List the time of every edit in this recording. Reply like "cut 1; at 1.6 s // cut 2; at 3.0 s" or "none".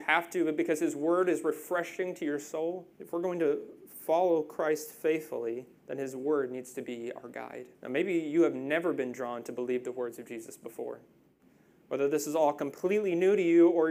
cut 1; at 2.9 s // cut 2; at 5.8 s // cut 3; at 7.7 s